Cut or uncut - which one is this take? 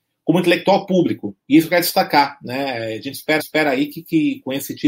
cut